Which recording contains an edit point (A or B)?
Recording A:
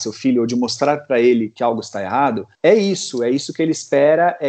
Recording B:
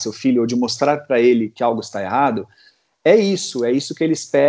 A